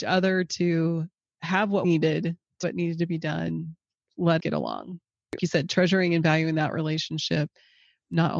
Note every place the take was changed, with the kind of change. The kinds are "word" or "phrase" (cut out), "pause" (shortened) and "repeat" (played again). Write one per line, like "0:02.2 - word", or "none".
0:01.8 - word
0:02.6 - word
0:04.4 - word
0:05.4 - word